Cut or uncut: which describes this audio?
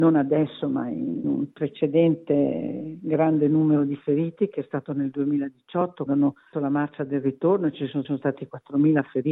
cut